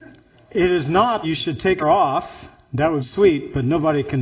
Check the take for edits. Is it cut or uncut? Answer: cut